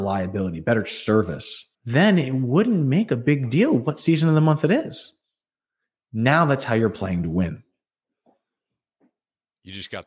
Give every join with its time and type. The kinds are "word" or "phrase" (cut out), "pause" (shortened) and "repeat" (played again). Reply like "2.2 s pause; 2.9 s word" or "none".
1.7 s pause